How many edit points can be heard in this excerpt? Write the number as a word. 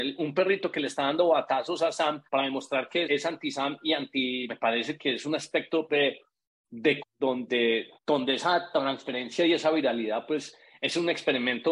six